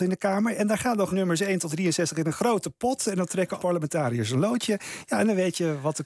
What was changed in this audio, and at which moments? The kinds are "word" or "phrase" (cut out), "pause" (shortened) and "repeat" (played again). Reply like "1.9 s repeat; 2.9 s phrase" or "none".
1.1 s phrase; 1.7 s phrase; 3.6 s word